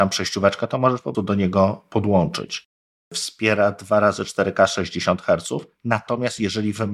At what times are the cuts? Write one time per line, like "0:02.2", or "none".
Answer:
0:01.1